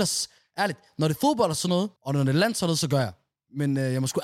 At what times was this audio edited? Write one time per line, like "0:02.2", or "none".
0:02.0